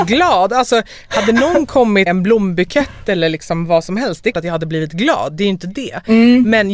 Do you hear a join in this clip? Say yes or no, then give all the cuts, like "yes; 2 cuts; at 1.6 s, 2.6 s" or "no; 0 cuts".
yes; 2 cuts; at 2.1 s, 4.3 s